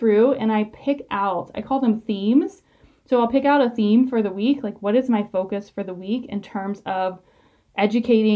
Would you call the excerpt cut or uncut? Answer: uncut